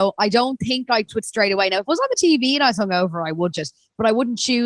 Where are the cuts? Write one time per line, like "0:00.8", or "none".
0:01.1
0:03.5